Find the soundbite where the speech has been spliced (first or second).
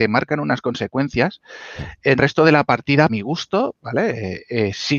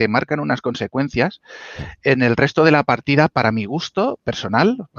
first